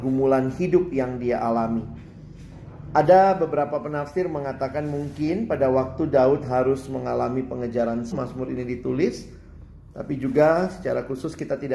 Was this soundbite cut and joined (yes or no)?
yes